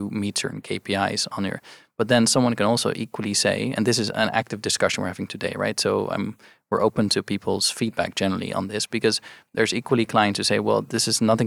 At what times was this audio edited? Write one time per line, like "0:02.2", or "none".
none